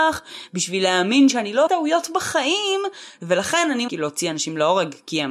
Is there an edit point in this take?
yes; 2 cuts; at 1.7 s, 3.9 s

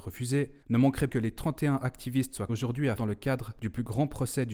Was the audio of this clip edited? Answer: yes; 3 cuts; at 1.1 s, 2.5 s, 3.0 s

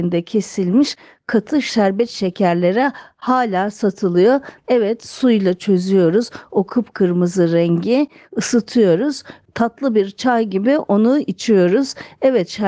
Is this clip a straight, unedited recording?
yes; 0 cuts

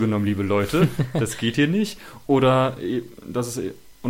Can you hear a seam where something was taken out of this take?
no; 0 cuts

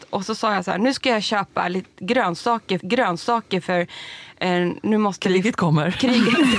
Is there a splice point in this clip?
yes; 1 cut; at 2.8 s

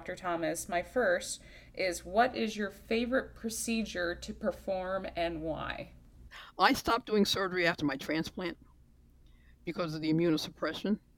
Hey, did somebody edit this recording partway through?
no; 0 cuts

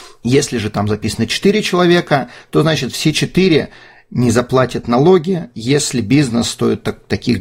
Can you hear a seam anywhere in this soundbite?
no; 0 cuts

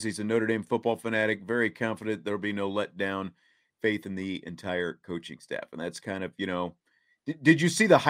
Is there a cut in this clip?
no; 0 cuts

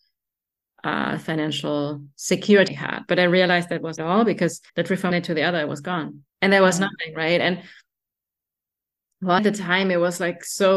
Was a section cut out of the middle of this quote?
yes; 6 cuts; at 2.7 s, 4.0 s, 4.7 s, 5.1 s, 6.3 s, 9.4 s

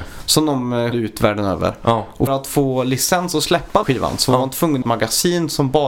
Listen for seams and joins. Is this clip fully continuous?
no; 4 cuts; at 0.9 s, 2.3 s, 3.8 s, 4.8 s

